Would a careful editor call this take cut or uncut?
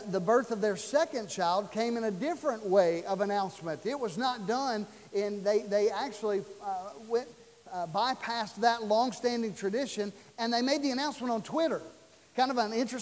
uncut